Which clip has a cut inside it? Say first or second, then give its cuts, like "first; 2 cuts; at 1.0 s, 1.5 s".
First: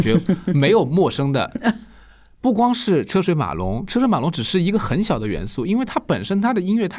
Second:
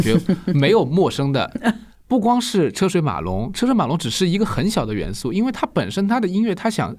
second; 1 cut; at 1.9 s